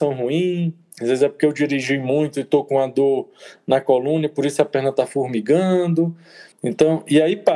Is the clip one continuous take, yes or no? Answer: no